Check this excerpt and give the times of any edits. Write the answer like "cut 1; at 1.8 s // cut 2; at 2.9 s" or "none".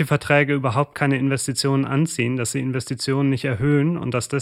none